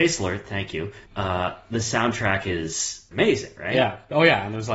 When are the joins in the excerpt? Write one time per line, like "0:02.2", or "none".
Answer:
0:01.1
0:03.1